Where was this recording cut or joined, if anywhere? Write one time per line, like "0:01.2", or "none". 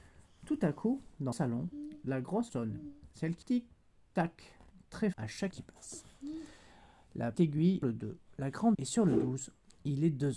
0:01.3
0:02.5
0:03.4
0:05.1
0:05.5
0:07.3
0:07.8
0:08.7